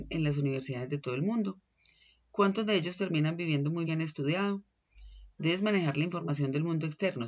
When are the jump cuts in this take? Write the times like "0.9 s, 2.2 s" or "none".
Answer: 3.8 s